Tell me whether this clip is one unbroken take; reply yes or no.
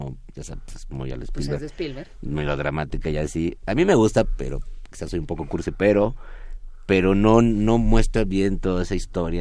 yes